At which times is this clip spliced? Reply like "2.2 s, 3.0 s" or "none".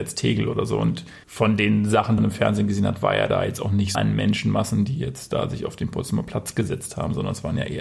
1.2 s, 2.2 s, 3.9 s